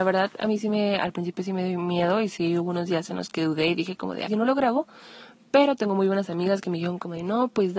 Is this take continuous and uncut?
no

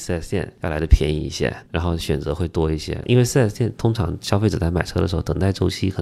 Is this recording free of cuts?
no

